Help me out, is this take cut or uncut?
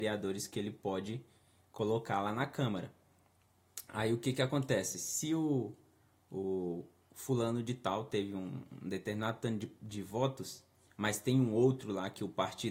uncut